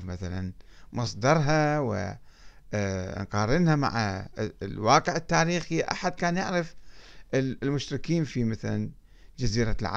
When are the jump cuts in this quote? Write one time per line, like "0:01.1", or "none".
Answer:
none